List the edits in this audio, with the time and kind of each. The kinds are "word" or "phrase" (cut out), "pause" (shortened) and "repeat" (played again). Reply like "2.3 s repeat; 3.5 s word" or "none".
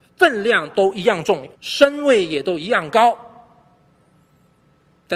1.5 s pause